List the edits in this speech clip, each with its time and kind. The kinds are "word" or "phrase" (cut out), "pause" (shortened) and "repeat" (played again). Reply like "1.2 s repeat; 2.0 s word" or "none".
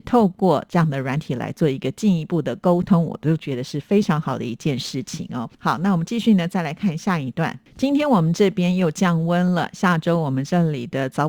5.5 s pause